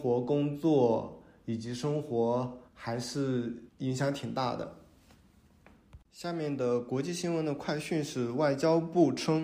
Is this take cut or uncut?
cut